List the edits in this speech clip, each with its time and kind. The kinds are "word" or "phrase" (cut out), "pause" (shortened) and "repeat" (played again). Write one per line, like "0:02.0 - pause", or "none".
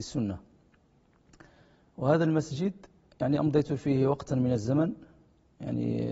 none

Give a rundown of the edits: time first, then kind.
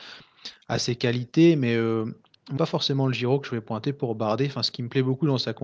0:02.6 - word

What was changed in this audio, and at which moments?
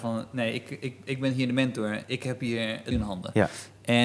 0:02.0 - word
0:02.9 - word

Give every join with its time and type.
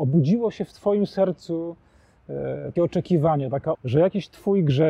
0:02.8 - word
0:03.7 - word

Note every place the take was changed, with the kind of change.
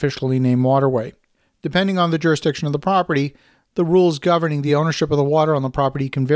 none

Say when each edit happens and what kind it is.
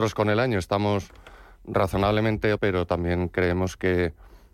0:02.6 - word

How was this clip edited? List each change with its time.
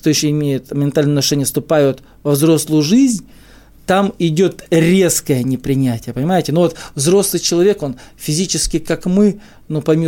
none

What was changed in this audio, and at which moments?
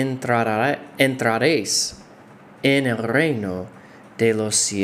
none

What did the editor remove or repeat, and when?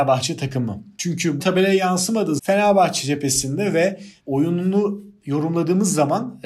0:01.4 - word
0:02.4 - word
0:04.2 - word

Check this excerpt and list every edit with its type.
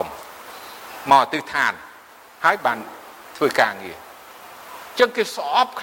none

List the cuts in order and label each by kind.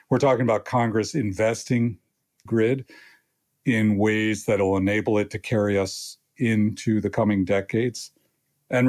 0:02.5 - phrase

